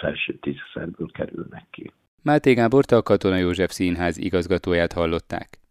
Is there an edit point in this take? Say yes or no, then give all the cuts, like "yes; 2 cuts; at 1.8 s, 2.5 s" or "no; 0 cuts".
no; 0 cuts